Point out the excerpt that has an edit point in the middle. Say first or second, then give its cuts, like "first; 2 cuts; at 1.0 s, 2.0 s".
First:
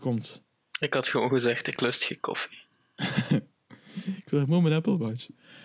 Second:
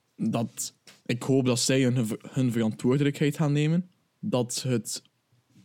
second; 1 cut; at 4.0 s